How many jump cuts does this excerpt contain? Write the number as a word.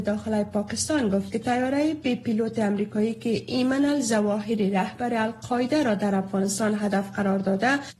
one